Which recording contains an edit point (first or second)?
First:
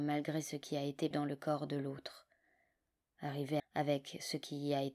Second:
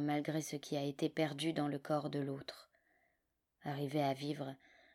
first